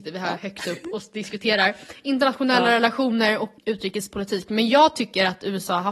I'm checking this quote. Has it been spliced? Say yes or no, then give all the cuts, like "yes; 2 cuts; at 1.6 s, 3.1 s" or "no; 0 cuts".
yes; 1 cut; at 3.6 s